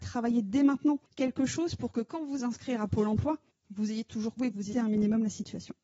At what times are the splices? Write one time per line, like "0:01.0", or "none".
0:01.0
0:02.4
0:03.5
0:04.4
0:04.7